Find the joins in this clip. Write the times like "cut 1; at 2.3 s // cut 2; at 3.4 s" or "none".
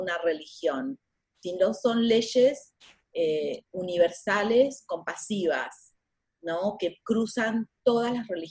none